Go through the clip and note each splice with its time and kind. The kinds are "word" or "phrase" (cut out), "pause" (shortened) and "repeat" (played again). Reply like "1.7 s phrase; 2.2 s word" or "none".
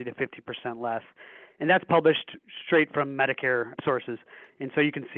none